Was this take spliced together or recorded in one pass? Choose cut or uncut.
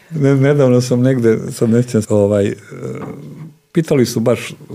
cut